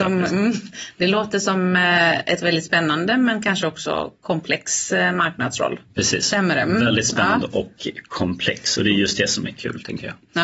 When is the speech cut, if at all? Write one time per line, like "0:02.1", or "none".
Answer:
0:05.9